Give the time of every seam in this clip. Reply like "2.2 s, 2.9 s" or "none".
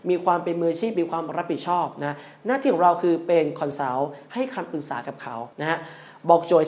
5.5 s